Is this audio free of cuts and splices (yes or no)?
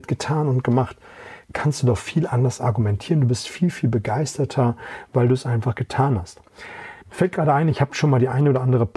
no